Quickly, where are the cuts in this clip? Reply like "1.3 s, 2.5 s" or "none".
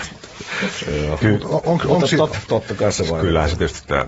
1.2 s, 1.6 s, 2.3 s